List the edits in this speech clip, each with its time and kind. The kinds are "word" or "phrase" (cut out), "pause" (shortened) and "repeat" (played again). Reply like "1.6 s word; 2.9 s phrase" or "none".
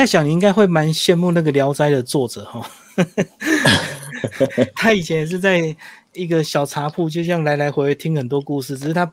none